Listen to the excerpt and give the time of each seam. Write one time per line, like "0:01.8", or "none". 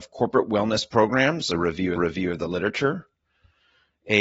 0:02.0